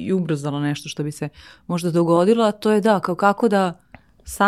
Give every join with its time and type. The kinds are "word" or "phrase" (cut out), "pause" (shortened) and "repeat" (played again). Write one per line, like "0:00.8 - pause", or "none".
none